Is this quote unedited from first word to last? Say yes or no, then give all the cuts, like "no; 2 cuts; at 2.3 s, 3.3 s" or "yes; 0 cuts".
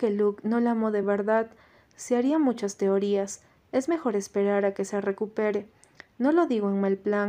yes; 0 cuts